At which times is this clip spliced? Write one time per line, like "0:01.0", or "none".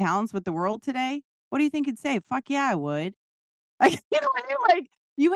none

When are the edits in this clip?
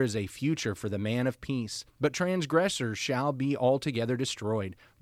0:01.9

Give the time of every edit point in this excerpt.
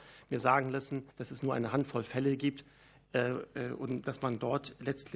0:01.1

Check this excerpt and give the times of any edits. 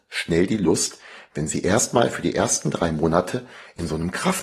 none

